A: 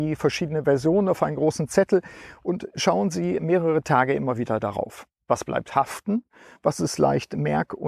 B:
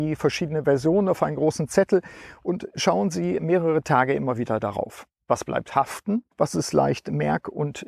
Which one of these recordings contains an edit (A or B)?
B